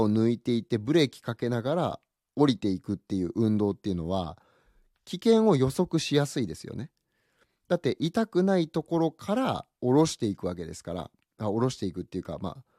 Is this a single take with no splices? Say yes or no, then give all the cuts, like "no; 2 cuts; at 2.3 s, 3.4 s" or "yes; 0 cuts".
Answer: yes; 0 cuts